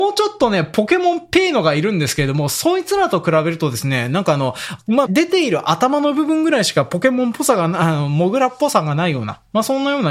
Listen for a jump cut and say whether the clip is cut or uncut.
cut